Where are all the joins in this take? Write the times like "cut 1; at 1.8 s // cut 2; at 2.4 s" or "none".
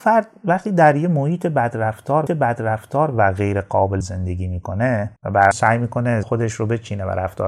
cut 1; at 2.3 s // cut 2; at 4.0 s // cut 3; at 5.2 s // cut 4; at 5.5 s // cut 5; at 6.2 s

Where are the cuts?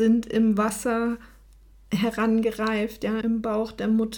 cut 1; at 3.2 s

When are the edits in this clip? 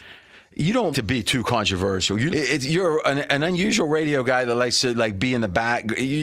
cut 1; at 0.9 s // cut 2; at 2.3 s

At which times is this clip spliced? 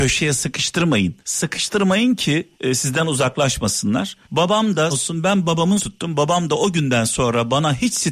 cut 1; at 1.2 s // cut 2; at 2.5 s // cut 3; at 4.2 s // cut 4; at 4.9 s // cut 5; at 5.8 s

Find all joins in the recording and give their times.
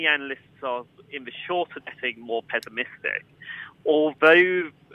cut 1; at 1.8 s

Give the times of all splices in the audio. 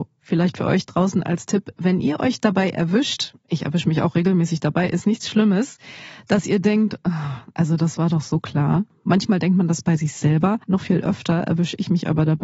cut 1; at 10.6 s

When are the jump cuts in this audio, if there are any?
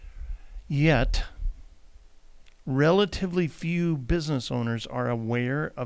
none

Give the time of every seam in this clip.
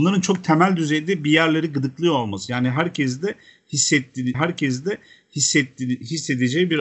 cut 1; at 4.3 s

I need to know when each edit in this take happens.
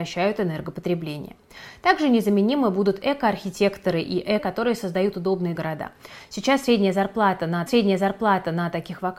cut 1; at 4.4 s // cut 2; at 5.5 s // cut 3; at 7.7 s

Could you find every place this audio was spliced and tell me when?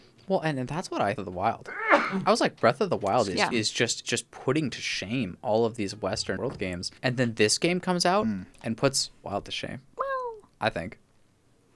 cut 1; at 1.2 s // cut 2; at 4.0 s // cut 3; at 6.4 s // cut 4; at 7.0 s // cut 5; at 8.5 s // cut 6; at 9.2 s // cut 7; at 9.9 s

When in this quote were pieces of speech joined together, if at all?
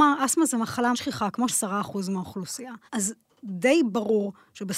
cut 1; at 0.9 s // cut 2; at 1.5 s // cut 3; at 2.9 s

